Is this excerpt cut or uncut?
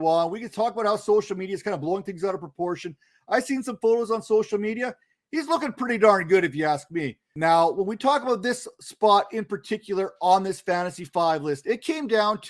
uncut